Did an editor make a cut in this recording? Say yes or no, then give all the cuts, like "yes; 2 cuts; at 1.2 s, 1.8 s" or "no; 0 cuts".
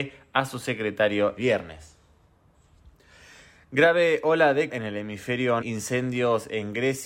yes; 3 cuts; at 1.4 s, 4.7 s, 5.6 s